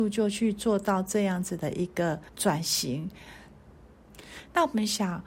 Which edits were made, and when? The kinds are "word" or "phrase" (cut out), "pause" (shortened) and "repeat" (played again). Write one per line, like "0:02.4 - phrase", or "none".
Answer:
0:02.3 - pause